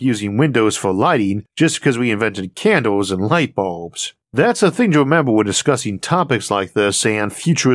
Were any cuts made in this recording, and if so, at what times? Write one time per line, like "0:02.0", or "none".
0:04.2